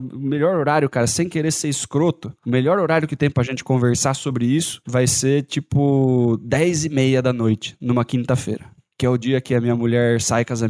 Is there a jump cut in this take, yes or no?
no